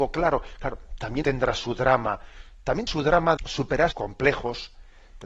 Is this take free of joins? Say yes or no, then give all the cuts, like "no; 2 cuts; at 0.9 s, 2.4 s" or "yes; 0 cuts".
no; 4 cuts; at 1.2 s, 2.9 s, 3.4 s, 3.9 s